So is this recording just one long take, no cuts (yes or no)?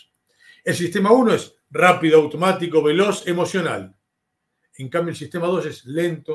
yes